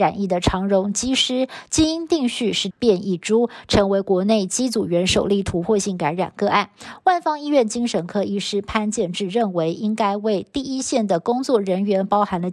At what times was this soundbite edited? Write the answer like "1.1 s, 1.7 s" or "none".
2.7 s